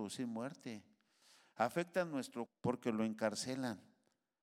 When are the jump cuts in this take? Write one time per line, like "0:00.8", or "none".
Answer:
0:02.5